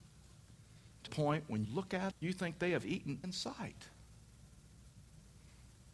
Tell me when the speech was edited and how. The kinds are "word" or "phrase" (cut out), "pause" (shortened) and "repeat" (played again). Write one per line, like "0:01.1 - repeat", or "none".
0:01.1 - word
0:01.6 - word
0:02.1 - word
0:03.2 - word